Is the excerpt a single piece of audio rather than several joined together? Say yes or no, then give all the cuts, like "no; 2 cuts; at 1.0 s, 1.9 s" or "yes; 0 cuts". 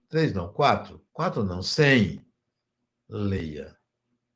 no; 1 cut; at 1.1 s